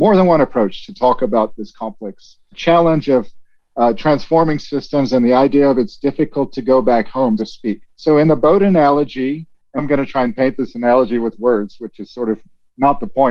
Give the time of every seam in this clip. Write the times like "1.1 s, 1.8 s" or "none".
2.5 s, 7.4 s, 7.9 s, 9.8 s